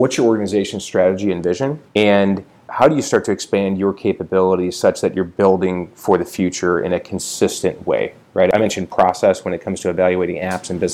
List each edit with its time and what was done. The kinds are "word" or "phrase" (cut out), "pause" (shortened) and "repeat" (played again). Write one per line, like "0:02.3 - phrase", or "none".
0:01.9 - pause